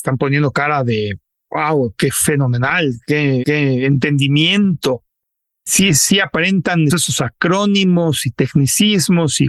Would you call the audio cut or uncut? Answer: cut